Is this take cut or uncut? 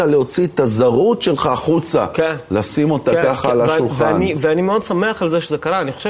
uncut